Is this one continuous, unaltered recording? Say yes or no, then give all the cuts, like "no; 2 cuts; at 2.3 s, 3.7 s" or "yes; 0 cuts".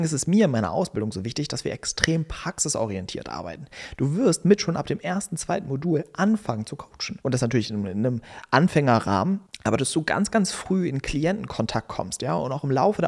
yes; 0 cuts